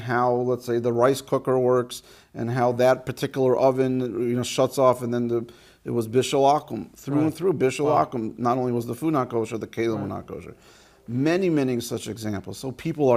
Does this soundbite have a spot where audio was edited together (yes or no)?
no